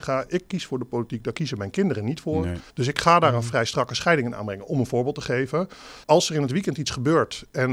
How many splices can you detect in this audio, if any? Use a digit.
2